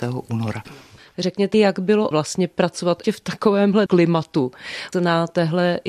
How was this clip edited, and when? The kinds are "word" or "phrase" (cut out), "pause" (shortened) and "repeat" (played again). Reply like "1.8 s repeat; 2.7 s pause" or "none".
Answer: 1.5 s word; 2.1 s word; 3.0 s word; 3.9 s word; 4.9 s word